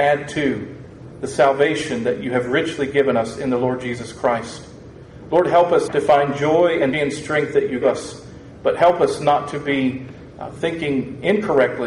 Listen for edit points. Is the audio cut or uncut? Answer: cut